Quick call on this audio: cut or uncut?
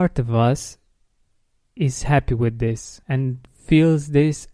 cut